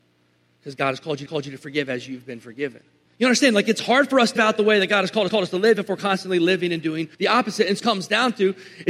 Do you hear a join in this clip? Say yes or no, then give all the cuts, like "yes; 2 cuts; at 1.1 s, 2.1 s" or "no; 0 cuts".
yes; 6 cuts; at 1.3 s, 3.1 s, 4.4 s, 5.3 s, 7.1 s, 7.8 s